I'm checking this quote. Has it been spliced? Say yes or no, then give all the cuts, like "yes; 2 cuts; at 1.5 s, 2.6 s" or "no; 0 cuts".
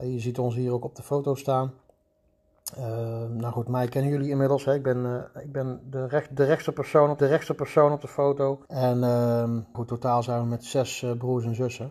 yes; 3 cuts; at 7.2 s, 8.7 s, 9.7 s